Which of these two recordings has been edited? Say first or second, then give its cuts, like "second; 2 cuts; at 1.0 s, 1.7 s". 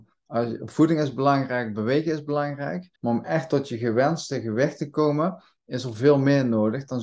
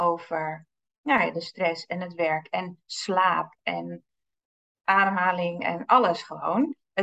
first; 1 cut; at 3.0 s